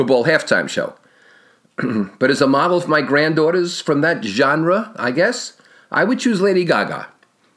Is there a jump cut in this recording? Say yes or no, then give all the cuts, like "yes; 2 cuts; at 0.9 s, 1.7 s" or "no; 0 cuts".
no; 0 cuts